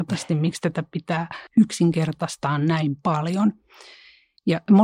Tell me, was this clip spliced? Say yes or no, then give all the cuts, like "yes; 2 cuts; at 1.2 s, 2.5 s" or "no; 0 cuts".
yes; 1 cut; at 1.5 s